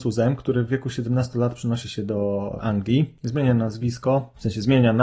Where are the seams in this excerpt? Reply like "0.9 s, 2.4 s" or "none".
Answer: none